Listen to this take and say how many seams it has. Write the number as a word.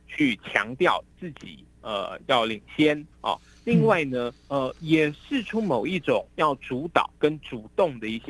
four